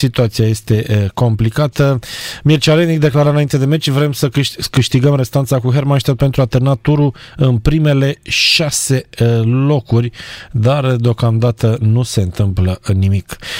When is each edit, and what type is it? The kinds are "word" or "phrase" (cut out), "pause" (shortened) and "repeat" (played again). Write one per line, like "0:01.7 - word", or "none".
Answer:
none